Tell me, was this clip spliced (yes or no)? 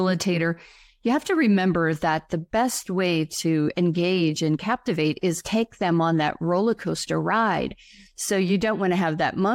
no